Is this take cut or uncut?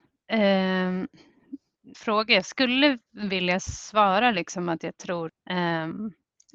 cut